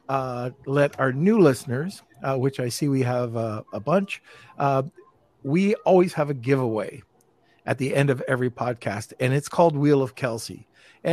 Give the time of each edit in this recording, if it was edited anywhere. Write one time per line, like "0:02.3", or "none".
none